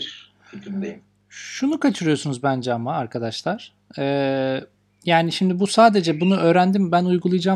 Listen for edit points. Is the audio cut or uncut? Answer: uncut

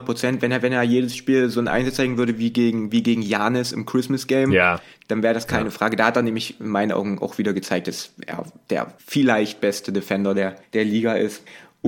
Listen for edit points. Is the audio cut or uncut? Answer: uncut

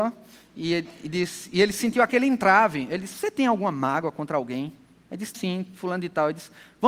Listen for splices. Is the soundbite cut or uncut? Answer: cut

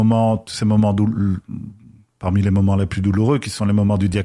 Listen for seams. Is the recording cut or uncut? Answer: uncut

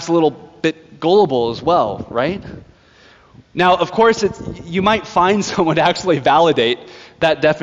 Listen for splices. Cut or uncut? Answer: uncut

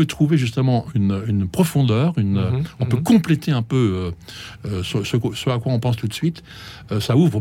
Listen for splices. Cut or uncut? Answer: uncut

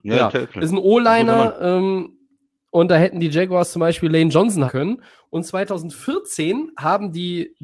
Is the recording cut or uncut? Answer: cut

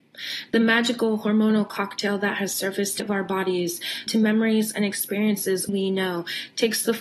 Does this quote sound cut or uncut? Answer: cut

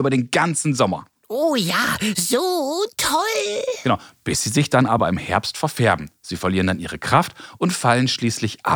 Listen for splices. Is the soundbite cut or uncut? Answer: uncut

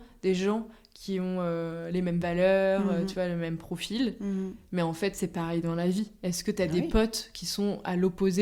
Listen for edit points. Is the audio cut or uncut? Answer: uncut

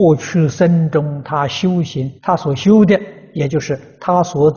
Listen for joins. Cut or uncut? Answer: cut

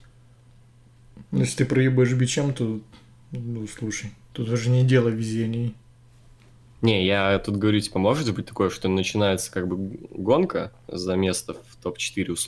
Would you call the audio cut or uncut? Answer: uncut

